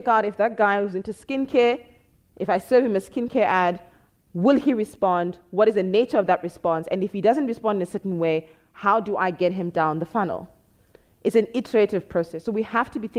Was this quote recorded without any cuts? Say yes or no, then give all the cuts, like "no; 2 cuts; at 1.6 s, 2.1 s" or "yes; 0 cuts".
yes; 0 cuts